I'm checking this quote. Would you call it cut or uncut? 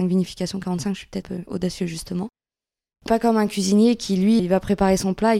cut